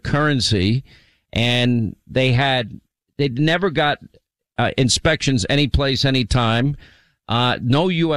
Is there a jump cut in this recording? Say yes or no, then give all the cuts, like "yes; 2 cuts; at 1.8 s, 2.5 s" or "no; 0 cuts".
no; 0 cuts